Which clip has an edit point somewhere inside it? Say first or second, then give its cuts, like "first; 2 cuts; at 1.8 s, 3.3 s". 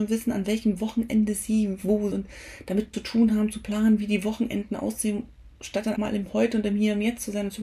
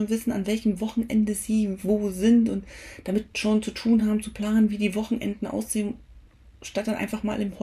first; 4 cuts; at 2.1 s, 2.9 s, 5.5 s, 6.0 s